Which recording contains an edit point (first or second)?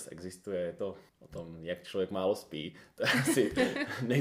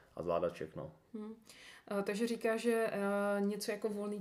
first